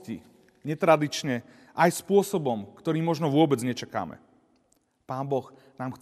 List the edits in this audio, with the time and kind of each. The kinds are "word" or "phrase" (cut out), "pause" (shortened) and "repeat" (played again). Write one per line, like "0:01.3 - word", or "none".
none